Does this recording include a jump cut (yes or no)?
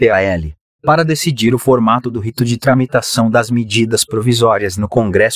no